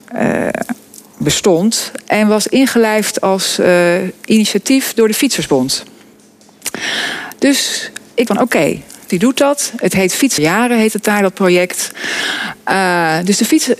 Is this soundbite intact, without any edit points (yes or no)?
no